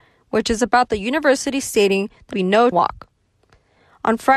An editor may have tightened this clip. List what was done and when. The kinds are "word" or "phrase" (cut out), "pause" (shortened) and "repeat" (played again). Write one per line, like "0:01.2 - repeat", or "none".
0:02.3 - word
0:02.7 - word